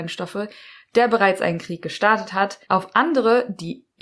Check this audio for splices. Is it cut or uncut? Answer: cut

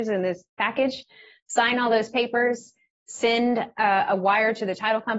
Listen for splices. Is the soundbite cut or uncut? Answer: uncut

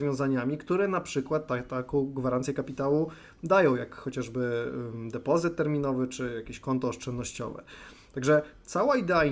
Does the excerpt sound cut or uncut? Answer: uncut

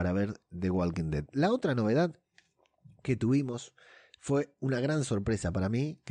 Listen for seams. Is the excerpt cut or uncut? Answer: uncut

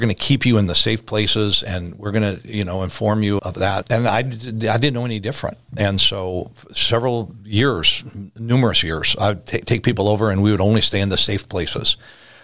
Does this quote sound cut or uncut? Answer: cut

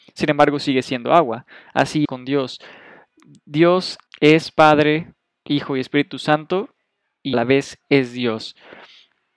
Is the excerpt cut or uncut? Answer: cut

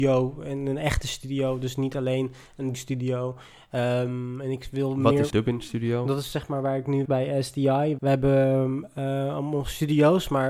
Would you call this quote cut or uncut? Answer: cut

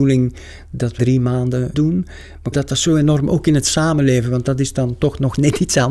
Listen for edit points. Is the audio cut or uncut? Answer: cut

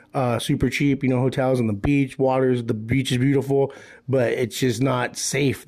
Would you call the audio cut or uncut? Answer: uncut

